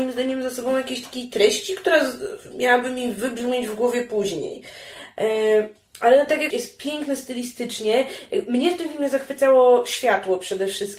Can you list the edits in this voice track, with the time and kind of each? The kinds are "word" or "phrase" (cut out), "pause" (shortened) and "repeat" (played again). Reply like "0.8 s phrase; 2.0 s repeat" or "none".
6.5 s word